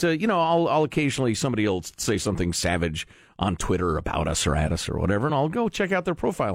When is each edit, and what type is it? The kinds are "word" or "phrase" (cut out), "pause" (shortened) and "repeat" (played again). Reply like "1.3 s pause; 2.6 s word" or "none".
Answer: none